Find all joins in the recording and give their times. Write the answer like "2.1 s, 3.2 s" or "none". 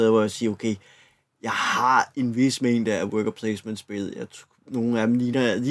none